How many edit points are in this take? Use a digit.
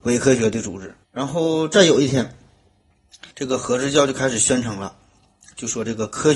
2